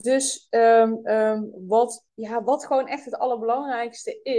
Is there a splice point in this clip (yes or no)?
yes